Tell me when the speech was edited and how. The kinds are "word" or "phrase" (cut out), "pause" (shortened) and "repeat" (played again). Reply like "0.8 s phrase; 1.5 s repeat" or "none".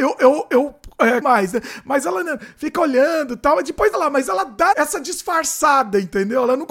1.2 s word; 3.9 s word; 4.7 s word